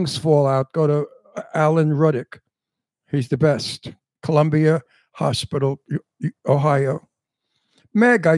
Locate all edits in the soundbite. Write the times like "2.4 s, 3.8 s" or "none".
none